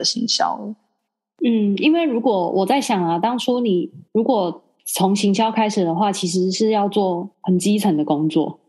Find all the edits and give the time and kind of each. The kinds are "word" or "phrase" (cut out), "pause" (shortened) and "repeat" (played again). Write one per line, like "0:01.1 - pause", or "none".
0:04.1 - pause
0:07.3 - pause

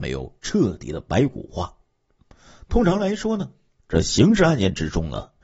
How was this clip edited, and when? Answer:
none

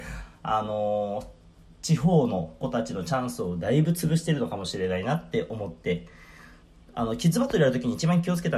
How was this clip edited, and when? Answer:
none

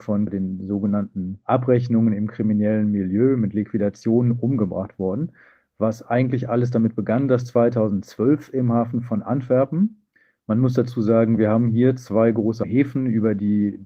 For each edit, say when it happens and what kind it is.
none

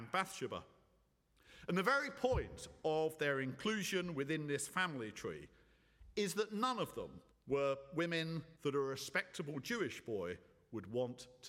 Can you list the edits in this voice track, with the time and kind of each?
0:07.3 - pause
0:08.6 - pause

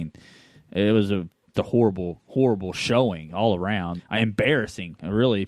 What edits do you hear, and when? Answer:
0:01.5 - word
0:04.0 - word

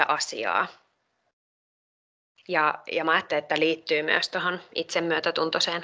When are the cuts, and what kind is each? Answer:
none

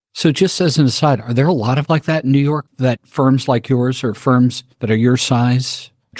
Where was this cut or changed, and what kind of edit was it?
0:01.9 - word
0:04.7 - pause

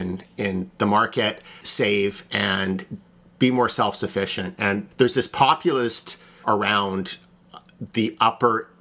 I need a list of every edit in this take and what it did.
0:01.6 - word
0:04.9 - word
0:06.4 - word

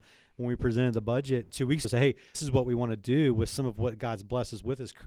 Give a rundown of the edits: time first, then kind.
0:01.5 - word
0:01.8 - word
0:02.3 - word

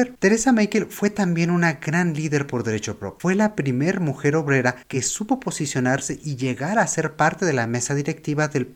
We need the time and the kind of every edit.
none

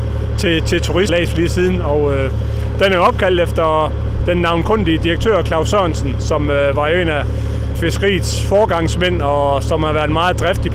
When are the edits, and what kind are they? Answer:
0:01.1 - phrase
0:07.7 - word

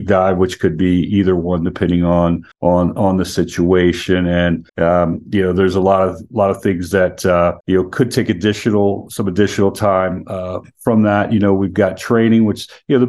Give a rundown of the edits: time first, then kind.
0:02.5 - pause
0:04.7 - pause
0:07.6 - pause

